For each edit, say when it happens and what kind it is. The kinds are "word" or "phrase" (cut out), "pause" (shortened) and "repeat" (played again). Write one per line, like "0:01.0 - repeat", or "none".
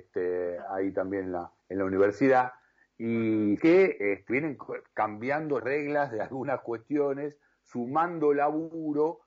0:01.6 - pause
0:03.6 - word
0:04.3 - word
0:05.6 - word